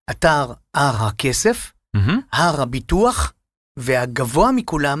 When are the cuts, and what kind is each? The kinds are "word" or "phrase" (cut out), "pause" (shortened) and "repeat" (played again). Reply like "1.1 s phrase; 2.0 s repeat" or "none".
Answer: none